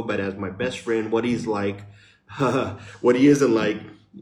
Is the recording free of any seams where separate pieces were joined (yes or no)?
yes